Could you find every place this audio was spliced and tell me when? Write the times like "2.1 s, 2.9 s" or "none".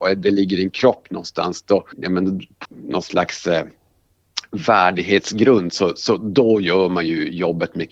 1.9 s, 2.6 s